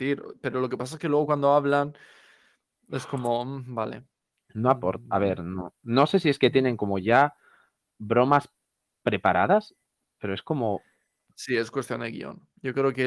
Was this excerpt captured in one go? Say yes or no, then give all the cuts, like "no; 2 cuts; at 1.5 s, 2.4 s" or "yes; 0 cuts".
yes; 0 cuts